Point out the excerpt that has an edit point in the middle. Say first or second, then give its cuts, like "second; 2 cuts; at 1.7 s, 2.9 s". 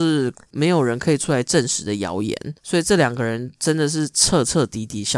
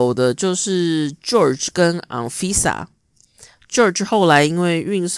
first; 1 cut; at 2.6 s